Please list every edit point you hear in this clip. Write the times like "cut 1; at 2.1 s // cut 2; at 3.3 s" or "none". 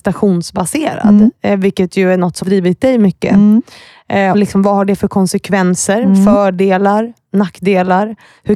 cut 1; at 2.4 s // cut 2; at 4.3 s